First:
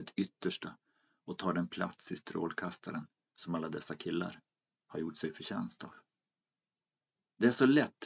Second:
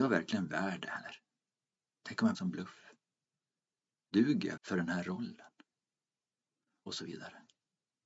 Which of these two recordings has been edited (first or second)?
second